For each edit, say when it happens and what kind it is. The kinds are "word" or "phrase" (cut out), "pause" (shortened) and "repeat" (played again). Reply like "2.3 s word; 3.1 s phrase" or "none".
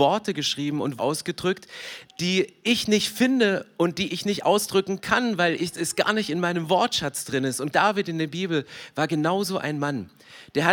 1.0 s word; 7.7 s word